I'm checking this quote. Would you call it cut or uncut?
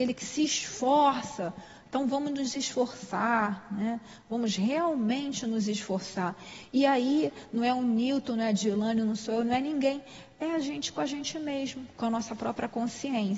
cut